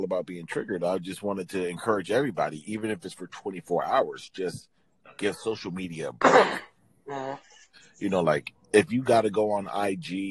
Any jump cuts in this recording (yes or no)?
no